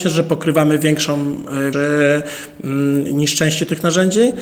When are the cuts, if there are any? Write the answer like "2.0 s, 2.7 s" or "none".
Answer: 1.7 s

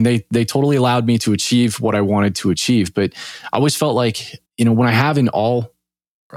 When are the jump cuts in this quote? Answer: 4.4 s

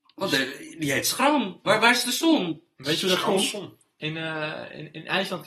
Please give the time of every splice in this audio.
none

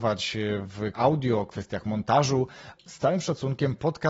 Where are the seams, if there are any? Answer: 0.9 s, 2.8 s

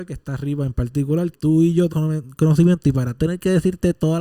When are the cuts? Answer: 1.3 s, 1.9 s, 3.2 s

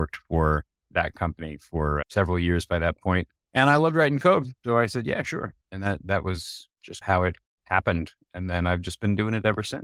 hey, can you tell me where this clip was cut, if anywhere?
3.4 s, 4.6 s, 5.6 s, 7.5 s

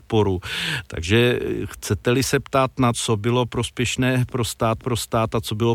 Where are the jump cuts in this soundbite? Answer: 2.9 s, 4.8 s

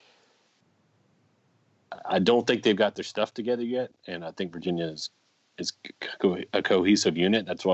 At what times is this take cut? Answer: none

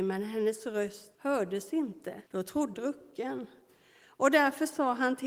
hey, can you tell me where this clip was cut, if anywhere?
1.1 s, 2.3 s, 2.7 s

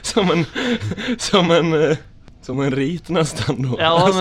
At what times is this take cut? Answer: none

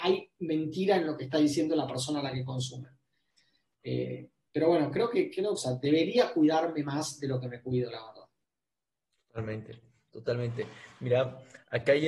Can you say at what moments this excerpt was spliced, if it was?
5.6 s

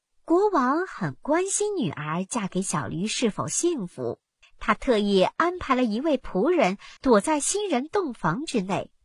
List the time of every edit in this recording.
4.4 s, 7.0 s

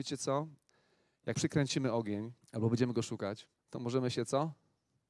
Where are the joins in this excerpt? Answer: 1.3 s, 2.4 s, 3.6 s

